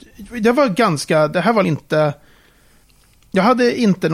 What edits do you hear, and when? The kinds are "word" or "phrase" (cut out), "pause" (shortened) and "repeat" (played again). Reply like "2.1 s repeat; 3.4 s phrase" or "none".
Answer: 1.6 s word